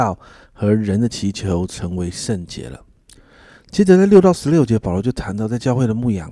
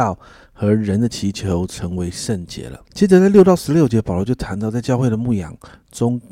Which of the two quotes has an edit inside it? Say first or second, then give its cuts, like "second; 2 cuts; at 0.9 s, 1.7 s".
second; 1 cut; at 2.8 s